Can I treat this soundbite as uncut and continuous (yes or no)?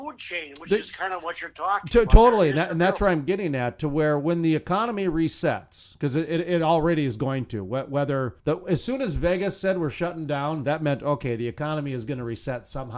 no